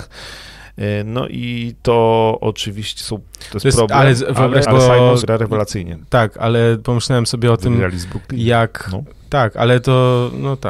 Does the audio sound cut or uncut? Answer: cut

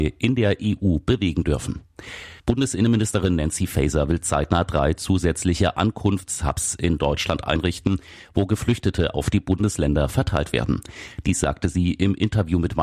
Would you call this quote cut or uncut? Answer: cut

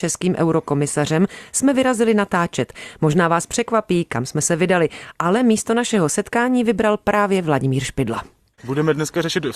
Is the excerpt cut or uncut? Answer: uncut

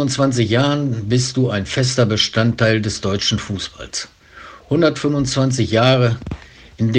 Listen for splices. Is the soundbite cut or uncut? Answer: uncut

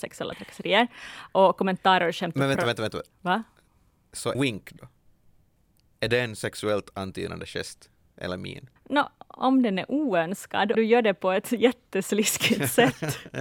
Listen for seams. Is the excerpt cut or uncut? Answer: cut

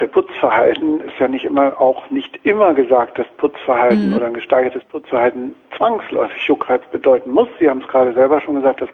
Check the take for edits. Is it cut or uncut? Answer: uncut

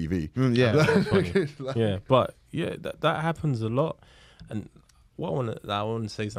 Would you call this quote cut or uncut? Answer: uncut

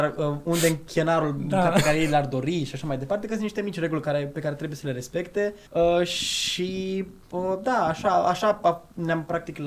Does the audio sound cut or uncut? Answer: cut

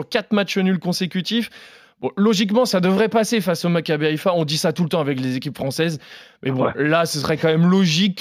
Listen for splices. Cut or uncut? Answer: uncut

